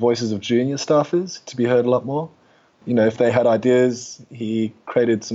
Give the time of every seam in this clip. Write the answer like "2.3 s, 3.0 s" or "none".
none